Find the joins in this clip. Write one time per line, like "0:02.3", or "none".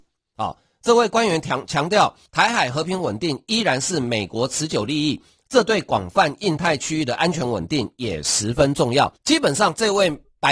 0:02.3
0:09.2